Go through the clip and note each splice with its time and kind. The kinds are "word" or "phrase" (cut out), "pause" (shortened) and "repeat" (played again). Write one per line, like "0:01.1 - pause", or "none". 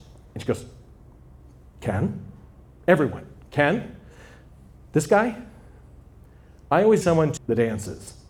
0:07.0 - word
0:07.4 - word

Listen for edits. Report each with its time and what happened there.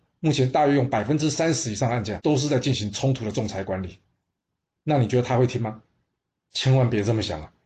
0:02.2 - word

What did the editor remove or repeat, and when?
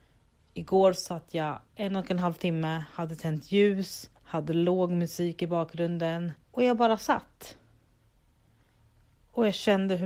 0:01.7 - pause
0:04.2 - pause
0:06.4 - pause

